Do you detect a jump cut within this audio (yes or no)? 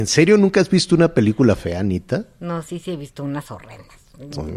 no